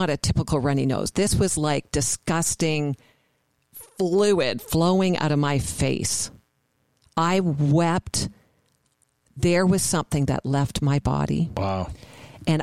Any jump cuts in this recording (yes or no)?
no